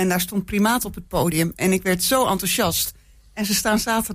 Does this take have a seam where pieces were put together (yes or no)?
no